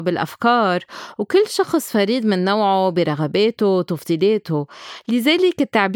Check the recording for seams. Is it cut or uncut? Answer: uncut